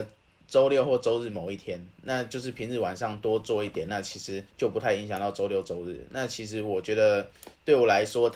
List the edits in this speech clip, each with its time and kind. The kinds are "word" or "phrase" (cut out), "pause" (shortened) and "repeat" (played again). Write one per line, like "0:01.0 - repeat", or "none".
0:01.9 - pause
0:04.5 - pause